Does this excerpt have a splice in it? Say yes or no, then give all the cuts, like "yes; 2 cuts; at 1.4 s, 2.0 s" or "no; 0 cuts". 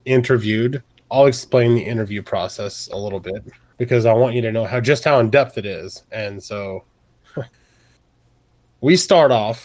yes; 1 cut; at 7.5 s